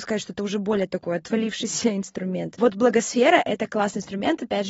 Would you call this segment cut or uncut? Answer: uncut